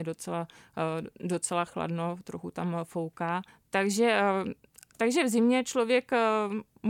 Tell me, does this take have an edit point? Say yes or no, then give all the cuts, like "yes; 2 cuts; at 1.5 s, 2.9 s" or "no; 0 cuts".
yes; 1 cut; at 3.5 s